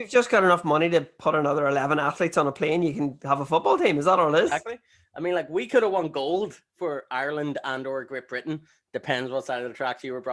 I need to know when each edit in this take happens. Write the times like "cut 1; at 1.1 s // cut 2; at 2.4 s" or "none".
none